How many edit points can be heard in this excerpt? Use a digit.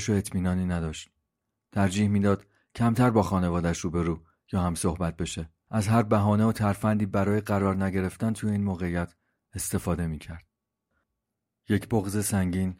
0